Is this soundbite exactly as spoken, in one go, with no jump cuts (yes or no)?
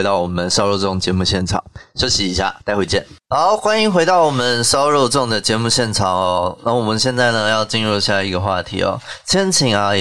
no